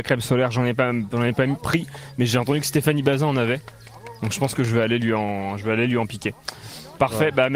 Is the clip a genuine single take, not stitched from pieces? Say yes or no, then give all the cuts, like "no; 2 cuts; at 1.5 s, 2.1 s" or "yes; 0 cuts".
yes; 0 cuts